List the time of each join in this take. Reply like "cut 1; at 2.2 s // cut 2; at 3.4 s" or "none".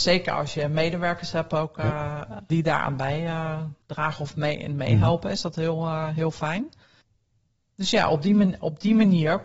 cut 1; at 3.8 s